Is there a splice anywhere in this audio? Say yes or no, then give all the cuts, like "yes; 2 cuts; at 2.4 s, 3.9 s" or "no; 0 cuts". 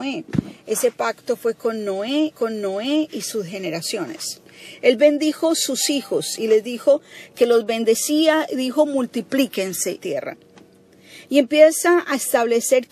yes; 2 cuts; at 2.3 s, 10.0 s